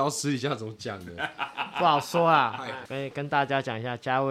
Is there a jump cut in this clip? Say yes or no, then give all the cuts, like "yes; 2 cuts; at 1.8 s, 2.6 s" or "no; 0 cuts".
yes; 1 cut; at 2.9 s